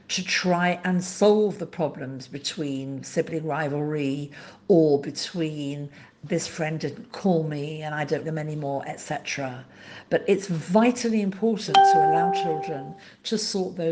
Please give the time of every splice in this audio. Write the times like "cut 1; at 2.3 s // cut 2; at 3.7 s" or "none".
cut 1; at 8.2 s